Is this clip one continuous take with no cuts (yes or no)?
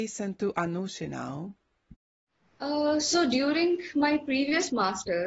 yes